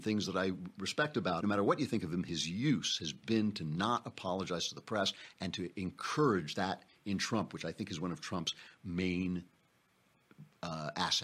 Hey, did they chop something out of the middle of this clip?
yes; 1 cut; at 1.4 s

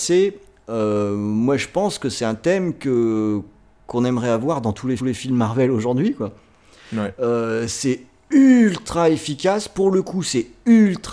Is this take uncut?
no; 1 cut; at 5.0 s

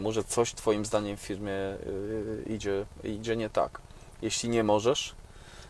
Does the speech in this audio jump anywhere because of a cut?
no; 0 cuts

